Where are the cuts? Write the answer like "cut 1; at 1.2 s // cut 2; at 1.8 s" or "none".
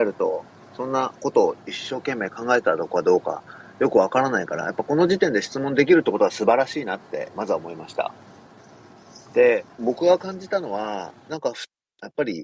cut 1; at 9.7 s